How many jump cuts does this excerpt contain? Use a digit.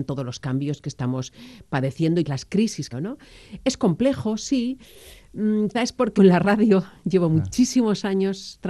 4